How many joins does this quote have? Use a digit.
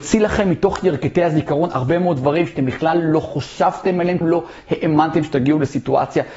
1